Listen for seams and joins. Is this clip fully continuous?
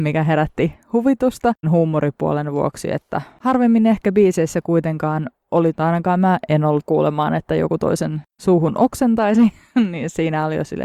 no; 3 cuts; at 1.6 s, 5.7 s, 6.8 s

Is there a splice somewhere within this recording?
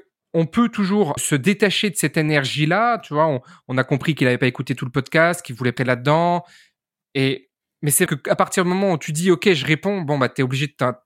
yes; 3 cuts; at 1.2 s, 5.8 s, 8.1 s

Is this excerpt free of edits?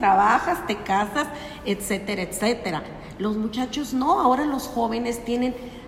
yes; 0 cuts

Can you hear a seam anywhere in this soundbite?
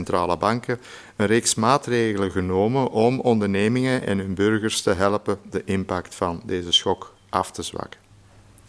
no; 0 cuts

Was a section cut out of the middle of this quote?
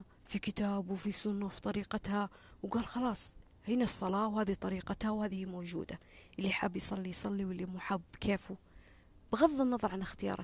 no; 0 cuts

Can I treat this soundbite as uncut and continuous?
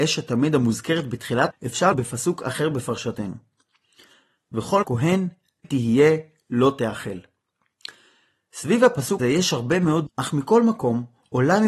no; 6 cuts; at 1.5 s, 1.9 s, 4.8 s, 5.6 s, 9.2 s, 10.1 s

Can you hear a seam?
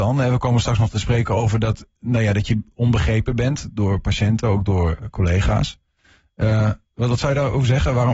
no; 0 cuts

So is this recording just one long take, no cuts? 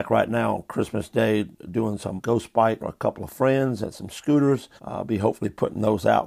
no; 4 cuts; at 2.2 s, 2.8 s, 3.3 s, 4.8 s

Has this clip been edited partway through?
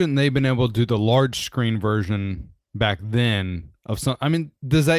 no; 0 cuts

